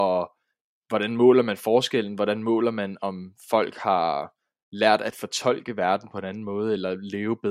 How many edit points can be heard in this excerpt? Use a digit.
0